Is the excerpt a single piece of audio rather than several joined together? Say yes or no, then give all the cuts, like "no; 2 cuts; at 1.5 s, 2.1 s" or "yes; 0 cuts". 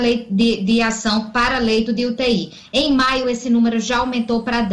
yes; 0 cuts